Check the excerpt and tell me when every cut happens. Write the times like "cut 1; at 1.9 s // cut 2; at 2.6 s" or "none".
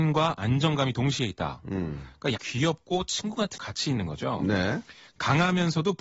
cut 1; at 2.4 s // cut 2; at 3.6 s